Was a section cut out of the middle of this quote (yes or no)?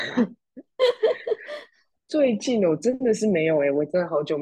no